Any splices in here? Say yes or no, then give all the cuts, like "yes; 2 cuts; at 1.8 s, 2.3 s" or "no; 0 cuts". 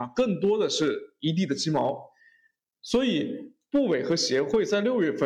no; 0 cuts